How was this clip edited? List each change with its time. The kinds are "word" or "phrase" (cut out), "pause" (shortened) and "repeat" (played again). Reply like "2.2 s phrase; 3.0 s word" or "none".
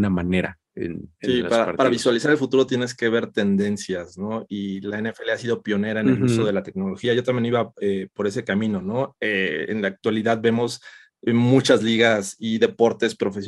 none